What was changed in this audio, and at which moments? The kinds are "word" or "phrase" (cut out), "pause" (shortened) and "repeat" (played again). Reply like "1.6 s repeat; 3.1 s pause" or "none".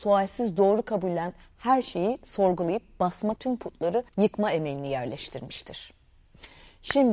3.4 s word; 4.1 s pause